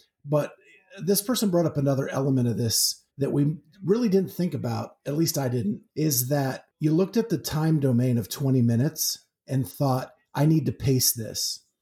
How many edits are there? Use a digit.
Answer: 3